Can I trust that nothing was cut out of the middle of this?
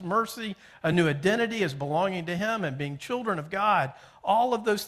yes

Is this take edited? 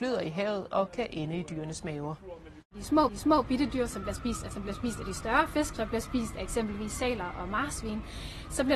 yes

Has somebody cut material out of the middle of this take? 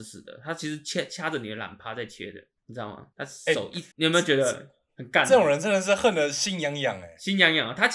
yes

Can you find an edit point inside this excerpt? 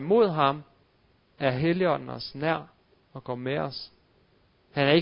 no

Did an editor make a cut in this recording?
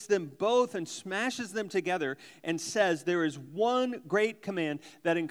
no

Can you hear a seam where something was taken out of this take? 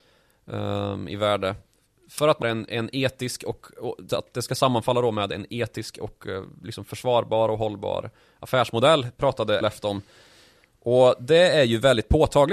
yes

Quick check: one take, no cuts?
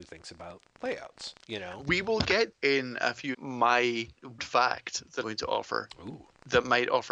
no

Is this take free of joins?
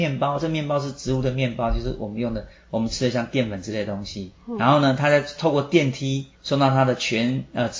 no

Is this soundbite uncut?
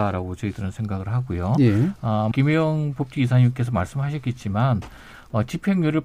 no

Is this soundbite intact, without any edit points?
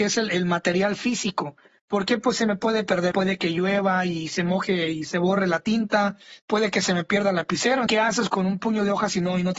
no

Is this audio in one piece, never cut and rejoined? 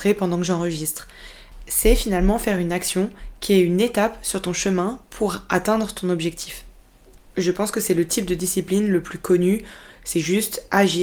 yes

